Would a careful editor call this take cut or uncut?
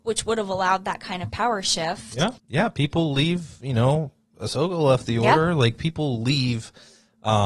cut